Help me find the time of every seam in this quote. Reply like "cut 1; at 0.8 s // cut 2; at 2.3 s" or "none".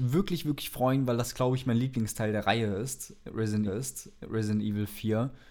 cut 1; at 3.7 s